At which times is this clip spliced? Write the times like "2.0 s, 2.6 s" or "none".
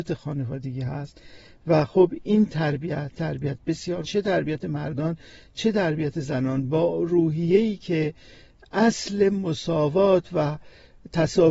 3.1 s, 4.0 s